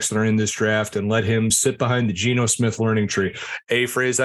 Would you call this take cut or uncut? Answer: uncut